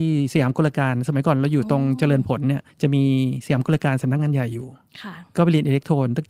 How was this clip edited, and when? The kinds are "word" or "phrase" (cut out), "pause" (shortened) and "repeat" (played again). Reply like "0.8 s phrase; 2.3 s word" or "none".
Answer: 2.7 s pause